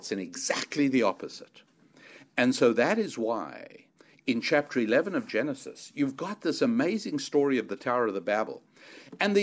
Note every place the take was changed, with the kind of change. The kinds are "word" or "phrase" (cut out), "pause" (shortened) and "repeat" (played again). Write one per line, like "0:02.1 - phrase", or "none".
none